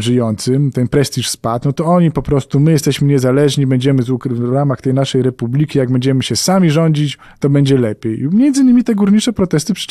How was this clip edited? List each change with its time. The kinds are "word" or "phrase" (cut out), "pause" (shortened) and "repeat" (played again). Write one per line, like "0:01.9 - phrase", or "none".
none

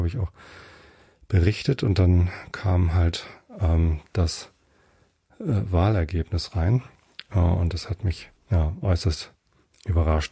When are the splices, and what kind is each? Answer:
0:08.4 - pause

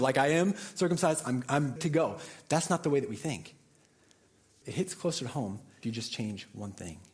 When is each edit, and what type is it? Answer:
0:01.8 - word
0:04.6 - word
0:05.8 - word

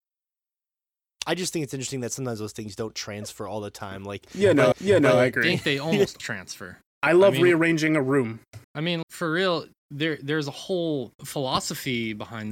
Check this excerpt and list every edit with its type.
0:04.7 - repeat
0:06.2 - word
0:08.6 - pause
0:09.0 - word
0:11.1 - pause

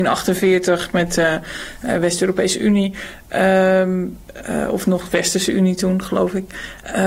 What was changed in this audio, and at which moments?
none

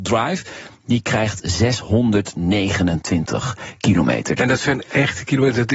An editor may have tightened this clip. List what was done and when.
none

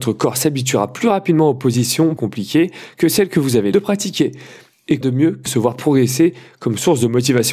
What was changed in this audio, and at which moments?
0:02.2 - word
0:03.7 - word
0:05.0 - word
0:05.5 - word

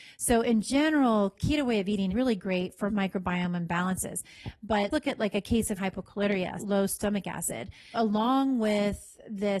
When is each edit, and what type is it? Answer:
0:01.3 - word
0:02.1 - word
0:02.9 - word
0:04.9 - word
0:05.8 - word
0:06.6 - word
0:07.9 - word

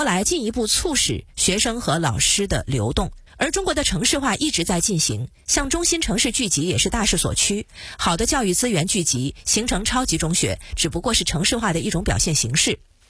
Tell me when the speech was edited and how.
0:03.3 - pause

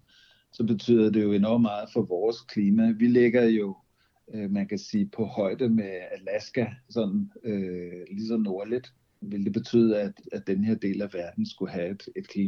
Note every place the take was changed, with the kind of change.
none

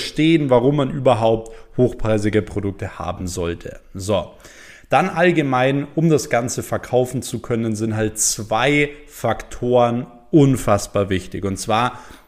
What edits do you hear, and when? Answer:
none

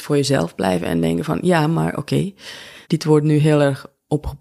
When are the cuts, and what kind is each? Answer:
0:02.8 - pause

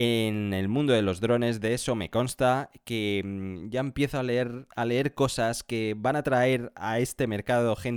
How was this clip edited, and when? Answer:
none

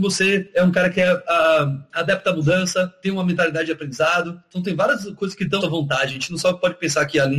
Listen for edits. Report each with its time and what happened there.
0:05.6 - phrase

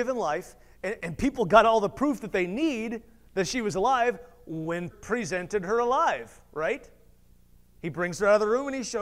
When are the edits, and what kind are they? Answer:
0:01.0 - word
0:04.9 - word

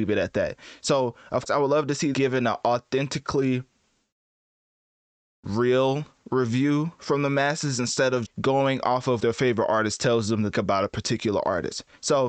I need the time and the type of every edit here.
0:01.5 - word
0:02.1 - word
0:08.2 - word
0:09.2 - word
0:10.5 - word

